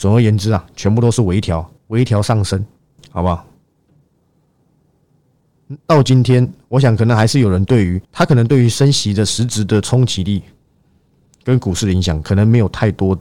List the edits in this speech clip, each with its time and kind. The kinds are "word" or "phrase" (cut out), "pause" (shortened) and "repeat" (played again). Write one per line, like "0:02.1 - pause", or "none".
0:01.8 - pause
0:03.0 - pause
0:05.8 - pause
0:08.0 - pause